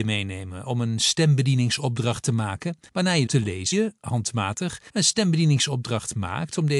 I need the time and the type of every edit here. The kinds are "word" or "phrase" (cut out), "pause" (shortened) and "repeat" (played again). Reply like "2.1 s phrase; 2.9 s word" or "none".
2.9 s pause; 3.3 s phrase; 3.7 s word; 4.9 s pause